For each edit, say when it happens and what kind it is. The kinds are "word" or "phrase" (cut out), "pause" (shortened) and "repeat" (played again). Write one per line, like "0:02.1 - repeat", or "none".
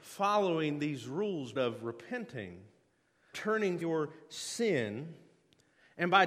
0:01.6 - word
0:03.3 - word
0:03.8 - word